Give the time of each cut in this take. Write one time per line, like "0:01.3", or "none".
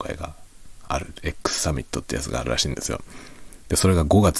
none